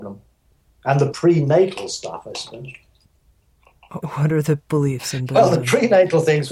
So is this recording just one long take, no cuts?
no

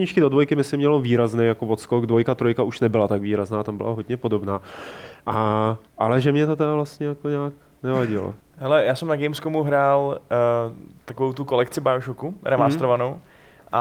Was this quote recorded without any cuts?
no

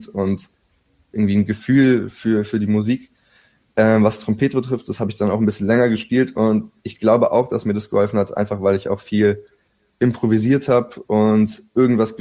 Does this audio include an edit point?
no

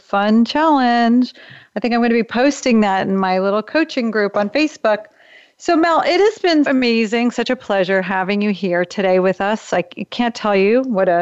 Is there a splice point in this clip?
yes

